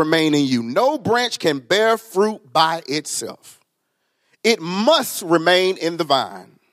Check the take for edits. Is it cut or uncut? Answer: uncut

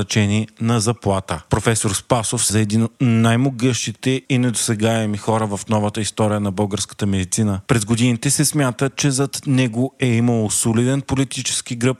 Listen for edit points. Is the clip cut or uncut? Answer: cut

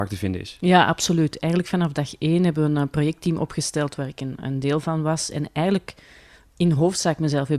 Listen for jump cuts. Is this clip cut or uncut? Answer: uncut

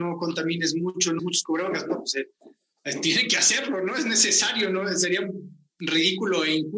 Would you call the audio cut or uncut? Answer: cut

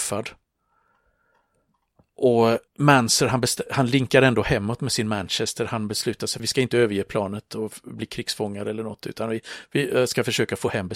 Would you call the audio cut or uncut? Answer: cut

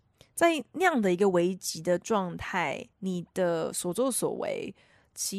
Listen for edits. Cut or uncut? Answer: cut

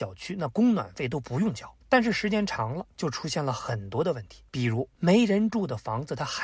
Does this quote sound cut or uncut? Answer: cut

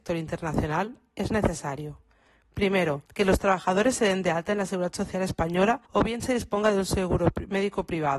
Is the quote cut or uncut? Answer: cut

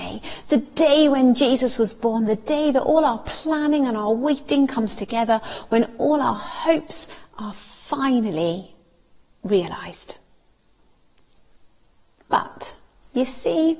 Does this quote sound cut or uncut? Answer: uncut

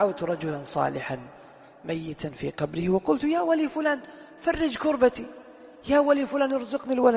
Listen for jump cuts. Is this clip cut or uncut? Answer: uncut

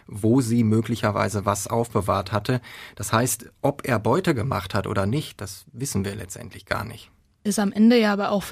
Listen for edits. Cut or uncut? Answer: uncut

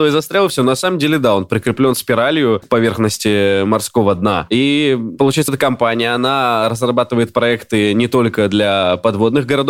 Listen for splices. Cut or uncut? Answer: cut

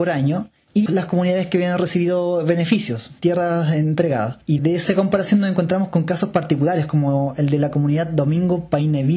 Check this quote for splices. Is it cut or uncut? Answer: uncut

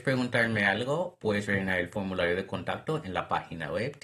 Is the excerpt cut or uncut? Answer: uncut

